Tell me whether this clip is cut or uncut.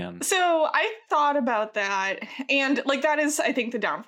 uncut